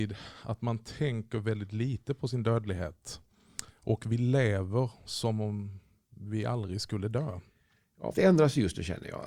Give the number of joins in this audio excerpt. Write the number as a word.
one